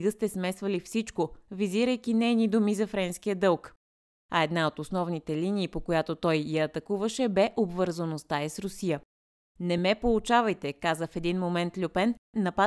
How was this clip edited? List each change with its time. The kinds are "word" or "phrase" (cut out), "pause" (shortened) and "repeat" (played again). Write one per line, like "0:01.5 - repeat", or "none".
none